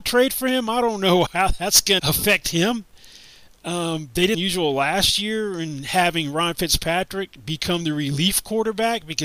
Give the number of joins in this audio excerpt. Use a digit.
3